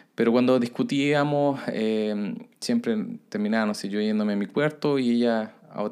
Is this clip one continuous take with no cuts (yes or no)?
no